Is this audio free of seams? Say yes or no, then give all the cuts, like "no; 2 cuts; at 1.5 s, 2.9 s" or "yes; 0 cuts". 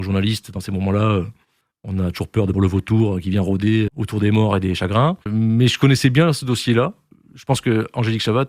no; 3 cuts; at 2.5 s, 3.9 s, 5.2 s